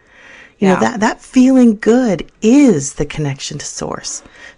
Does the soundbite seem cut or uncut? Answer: uncut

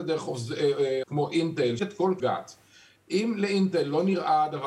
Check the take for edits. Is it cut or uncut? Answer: cut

